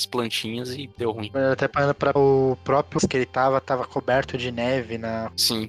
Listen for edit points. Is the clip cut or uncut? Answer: cut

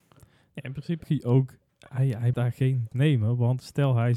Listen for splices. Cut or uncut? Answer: cut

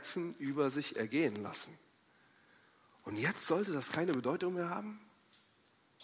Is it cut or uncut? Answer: uncut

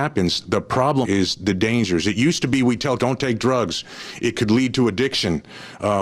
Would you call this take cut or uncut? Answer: cut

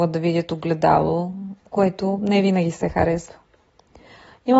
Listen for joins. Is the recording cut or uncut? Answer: uncut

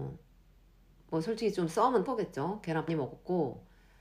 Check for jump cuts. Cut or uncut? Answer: cut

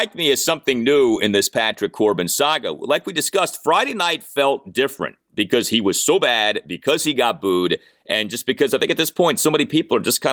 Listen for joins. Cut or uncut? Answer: uncut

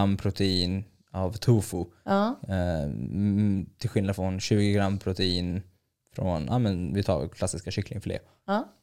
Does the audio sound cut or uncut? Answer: uncut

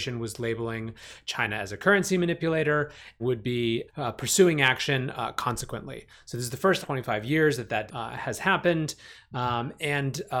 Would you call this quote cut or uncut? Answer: cut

